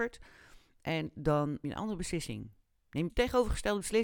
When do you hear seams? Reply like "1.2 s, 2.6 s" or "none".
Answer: 1.6 s, 3.1 s